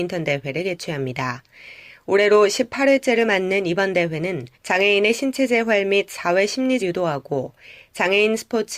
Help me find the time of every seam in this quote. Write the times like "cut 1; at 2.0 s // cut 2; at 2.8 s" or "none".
cut 1; at 4.5 s // cut 2; at 6.8 s